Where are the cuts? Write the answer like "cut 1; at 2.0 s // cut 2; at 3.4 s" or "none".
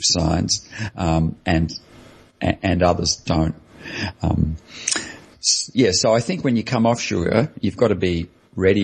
none